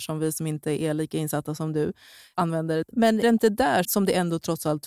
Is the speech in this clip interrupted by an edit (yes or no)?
yes